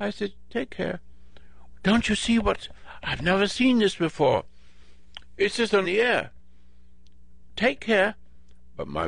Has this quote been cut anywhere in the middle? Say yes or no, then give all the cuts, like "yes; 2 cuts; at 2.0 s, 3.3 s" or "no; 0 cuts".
yes; 1 cut; at 5.8 s